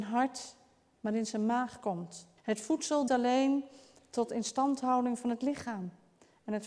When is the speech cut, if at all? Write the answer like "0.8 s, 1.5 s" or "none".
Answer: 2.4 s, 3.1 s